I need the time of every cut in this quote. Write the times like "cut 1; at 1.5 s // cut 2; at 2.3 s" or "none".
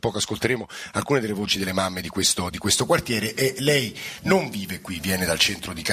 none